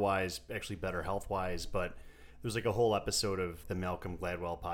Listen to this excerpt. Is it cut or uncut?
cut